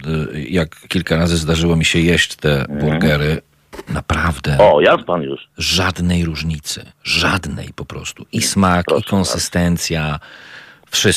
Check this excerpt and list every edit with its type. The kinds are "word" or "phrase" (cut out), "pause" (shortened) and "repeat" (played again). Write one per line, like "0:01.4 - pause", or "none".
0:06.9 - pause